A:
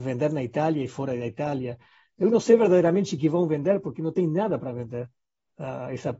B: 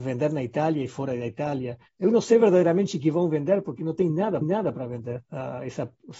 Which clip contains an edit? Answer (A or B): B